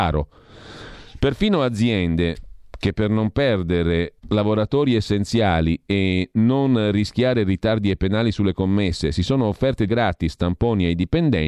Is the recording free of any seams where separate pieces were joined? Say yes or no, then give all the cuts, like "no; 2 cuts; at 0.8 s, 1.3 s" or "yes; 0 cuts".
no; 2 cuts; at 4.2 s, 9.9 s